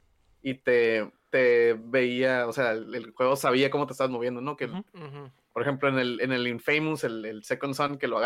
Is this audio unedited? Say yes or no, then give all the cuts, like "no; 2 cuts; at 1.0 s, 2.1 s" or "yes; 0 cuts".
yes; 0 cuts